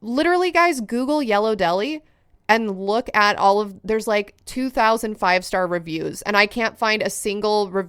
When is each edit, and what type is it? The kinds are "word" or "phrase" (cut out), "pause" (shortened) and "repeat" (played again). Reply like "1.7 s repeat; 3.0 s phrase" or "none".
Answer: none

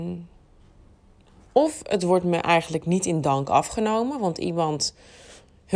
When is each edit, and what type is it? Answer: none

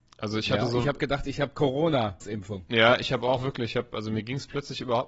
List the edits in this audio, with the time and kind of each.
2.2 s word

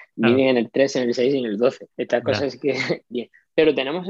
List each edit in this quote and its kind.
1.9 s pause; 3.1 s word

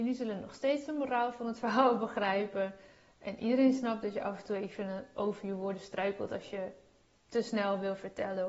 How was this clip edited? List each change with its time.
none

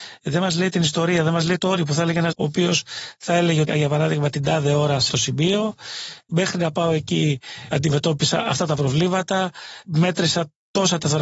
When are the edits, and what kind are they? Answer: 1.6 s word; 2.3 s word; 3.7 s word; 5.1 s word

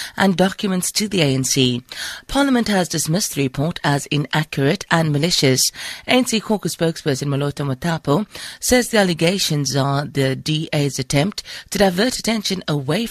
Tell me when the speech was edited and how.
none

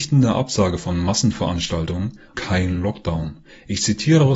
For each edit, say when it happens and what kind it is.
2.3 s word

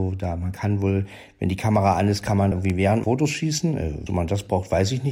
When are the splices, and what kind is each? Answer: 2.5 s word; 3.0 s phrase; 4.1 s word

